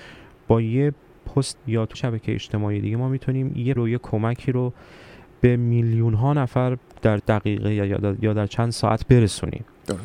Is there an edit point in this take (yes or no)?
yes